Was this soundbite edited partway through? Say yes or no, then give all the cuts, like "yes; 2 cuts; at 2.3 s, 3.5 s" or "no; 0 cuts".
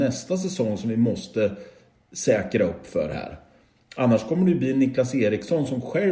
no; 0 cuts